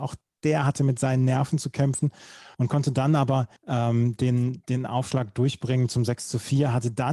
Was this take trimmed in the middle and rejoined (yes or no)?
yes